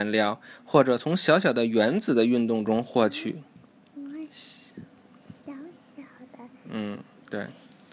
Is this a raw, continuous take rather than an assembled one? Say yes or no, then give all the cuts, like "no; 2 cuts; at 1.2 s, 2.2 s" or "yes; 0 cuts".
yes; 0 cuts